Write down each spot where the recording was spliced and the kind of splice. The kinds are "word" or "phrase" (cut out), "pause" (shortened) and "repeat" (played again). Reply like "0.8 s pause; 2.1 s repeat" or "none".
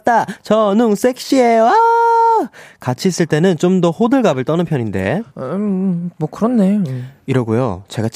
5.3 s pause